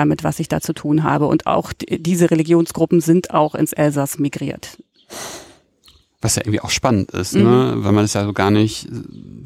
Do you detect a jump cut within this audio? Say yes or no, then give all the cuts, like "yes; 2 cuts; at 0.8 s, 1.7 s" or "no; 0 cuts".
no; 0 cuts